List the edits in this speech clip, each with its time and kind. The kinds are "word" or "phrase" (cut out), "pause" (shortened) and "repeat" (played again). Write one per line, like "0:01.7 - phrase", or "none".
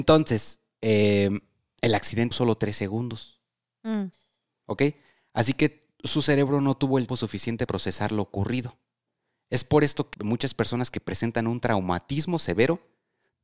0:02.3 - word
0:07.1 - word
0:07.7 - word
0:10.1 - word